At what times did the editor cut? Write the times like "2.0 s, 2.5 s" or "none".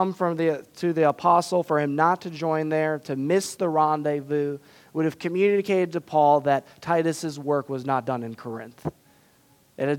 none